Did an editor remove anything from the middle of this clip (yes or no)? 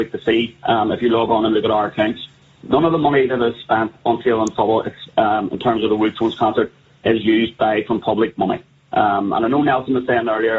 no